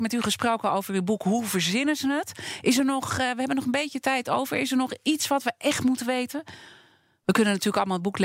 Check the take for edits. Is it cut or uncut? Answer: uncut